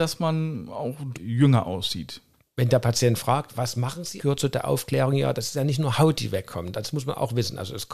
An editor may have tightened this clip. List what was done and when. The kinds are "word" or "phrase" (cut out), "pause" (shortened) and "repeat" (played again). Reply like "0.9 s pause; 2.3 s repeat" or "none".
1.1 s word; 4.2 s word